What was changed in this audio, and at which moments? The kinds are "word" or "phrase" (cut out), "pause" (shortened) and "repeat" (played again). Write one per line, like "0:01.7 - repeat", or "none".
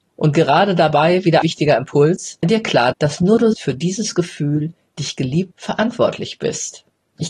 0:01.4 - word
0:02.4 - word
0:02.9 - word
0:03.5 - word
0:05.5 - word